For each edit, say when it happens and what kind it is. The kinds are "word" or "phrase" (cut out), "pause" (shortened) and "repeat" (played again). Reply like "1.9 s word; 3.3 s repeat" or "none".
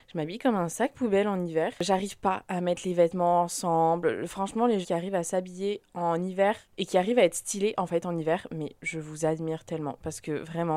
4.8 s word